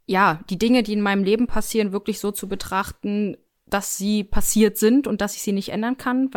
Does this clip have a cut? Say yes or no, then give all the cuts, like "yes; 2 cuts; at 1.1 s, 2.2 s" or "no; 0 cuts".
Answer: no; 0 cuts